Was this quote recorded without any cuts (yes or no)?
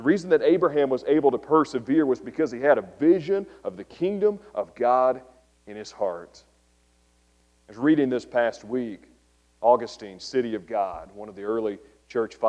yes